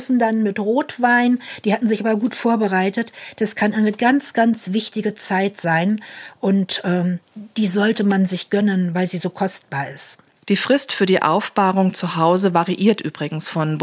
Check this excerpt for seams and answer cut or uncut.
uncut